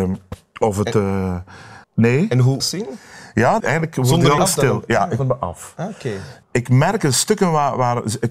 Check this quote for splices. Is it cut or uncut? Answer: cut